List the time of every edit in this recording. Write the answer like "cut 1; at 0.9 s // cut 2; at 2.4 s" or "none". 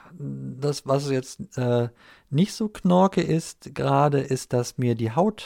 none